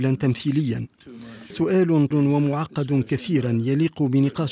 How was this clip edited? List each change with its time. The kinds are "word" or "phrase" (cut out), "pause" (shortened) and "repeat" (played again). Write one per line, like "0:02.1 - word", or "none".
0:01.5 - word
0:02.1 - word